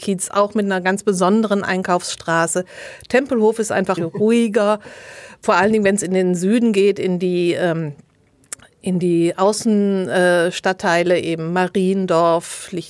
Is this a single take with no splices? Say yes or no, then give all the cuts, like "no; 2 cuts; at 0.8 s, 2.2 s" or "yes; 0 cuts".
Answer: no; 1 cut; at 4.0 s